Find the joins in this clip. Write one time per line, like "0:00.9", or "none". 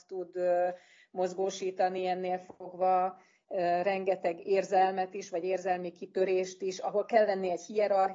none